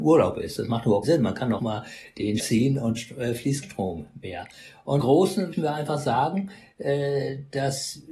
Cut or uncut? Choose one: cut